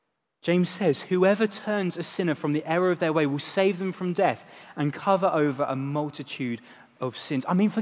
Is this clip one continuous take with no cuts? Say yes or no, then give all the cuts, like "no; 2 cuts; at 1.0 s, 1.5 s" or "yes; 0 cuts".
yes; 0 cuts